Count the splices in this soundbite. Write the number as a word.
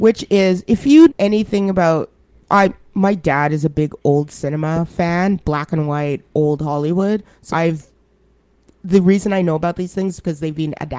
three